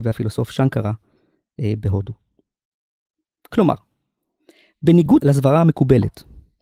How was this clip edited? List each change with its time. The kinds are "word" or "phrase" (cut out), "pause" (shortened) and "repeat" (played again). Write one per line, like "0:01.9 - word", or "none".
none